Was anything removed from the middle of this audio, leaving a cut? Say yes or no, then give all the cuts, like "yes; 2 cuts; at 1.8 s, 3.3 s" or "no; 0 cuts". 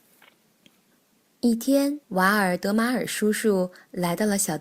yes; 1 cut; at 2.0 s